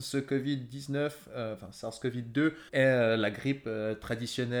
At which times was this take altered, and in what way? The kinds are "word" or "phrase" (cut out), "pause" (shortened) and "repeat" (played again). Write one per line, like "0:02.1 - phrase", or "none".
0:02.7 - pause